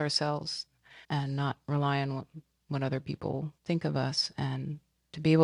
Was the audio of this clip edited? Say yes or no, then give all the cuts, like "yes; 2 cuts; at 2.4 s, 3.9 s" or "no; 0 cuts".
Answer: yes; 2 cuts; at 1.0 s, 3.6 s